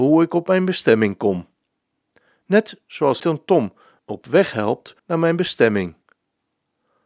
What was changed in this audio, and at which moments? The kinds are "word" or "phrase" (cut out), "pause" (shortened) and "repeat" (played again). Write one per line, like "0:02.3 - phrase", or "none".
0:03.2 - phrase
0:04.0 - word
0:05.0 - pause